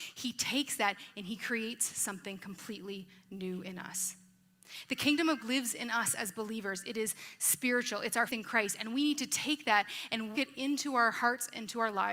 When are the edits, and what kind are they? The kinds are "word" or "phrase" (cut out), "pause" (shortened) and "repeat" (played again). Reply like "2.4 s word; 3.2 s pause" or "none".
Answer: 5.4 s word; 8.3 s word; 10.3 s word